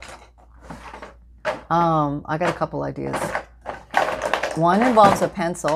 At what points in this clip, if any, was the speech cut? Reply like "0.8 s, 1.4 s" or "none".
none